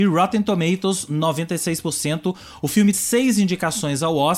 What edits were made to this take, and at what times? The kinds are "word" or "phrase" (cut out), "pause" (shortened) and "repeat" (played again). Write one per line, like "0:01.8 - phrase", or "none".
0:02.9 - word